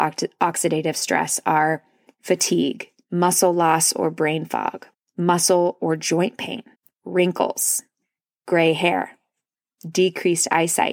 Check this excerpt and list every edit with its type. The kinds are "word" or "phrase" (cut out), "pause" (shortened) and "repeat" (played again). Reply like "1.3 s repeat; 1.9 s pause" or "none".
2.9 s pause; 4.9 s pause; 6.7 s pause